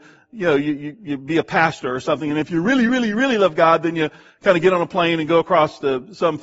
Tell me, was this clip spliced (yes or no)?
no